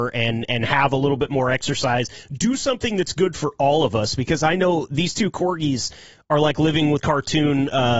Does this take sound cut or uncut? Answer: cut